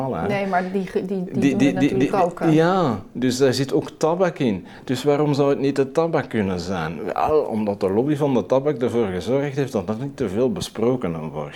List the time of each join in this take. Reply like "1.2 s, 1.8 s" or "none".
none